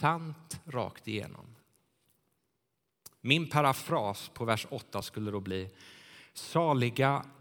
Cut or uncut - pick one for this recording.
uncut